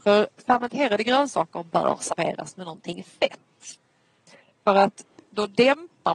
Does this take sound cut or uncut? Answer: uncut